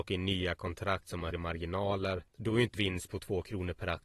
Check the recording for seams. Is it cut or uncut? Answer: cut